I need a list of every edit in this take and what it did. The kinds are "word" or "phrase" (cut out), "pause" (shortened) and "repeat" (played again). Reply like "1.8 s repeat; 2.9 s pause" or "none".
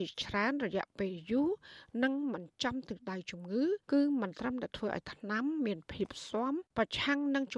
3.8 s pause; 6.7 s pause